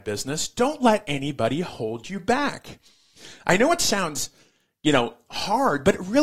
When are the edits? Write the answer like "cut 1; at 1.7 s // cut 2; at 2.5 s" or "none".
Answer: none